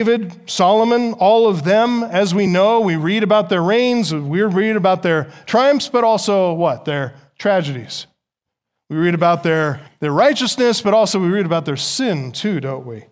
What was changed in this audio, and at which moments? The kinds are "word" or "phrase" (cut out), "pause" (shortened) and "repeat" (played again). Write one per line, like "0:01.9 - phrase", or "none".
none